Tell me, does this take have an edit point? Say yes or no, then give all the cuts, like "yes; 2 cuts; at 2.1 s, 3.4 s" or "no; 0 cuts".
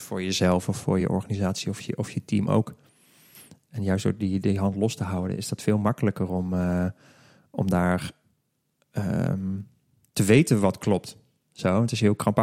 no; 0 cuts